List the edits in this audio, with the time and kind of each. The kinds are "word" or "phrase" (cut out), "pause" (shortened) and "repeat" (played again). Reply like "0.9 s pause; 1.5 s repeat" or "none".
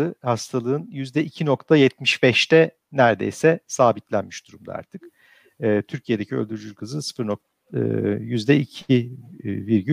none